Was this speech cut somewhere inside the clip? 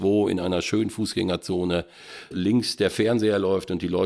yes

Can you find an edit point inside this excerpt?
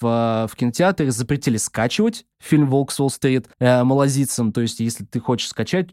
yes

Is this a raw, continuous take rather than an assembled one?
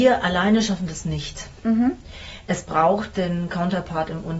yes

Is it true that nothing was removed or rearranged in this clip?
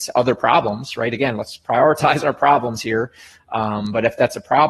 yes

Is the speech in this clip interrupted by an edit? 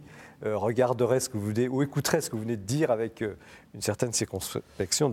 no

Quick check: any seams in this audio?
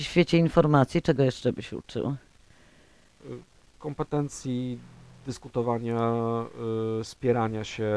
no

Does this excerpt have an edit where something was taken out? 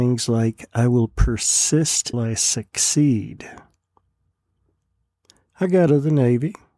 yes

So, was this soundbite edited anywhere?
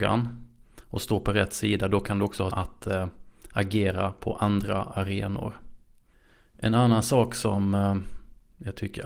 yes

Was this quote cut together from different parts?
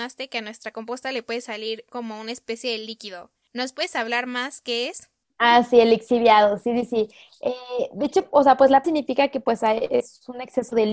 yes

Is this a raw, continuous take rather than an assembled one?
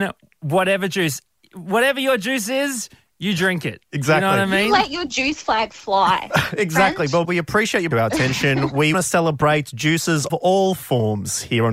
no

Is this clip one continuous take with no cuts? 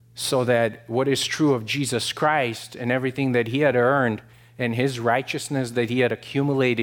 yes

